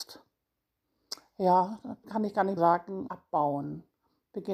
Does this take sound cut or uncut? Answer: cut